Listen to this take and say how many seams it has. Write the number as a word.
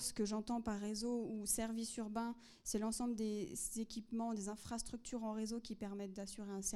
zero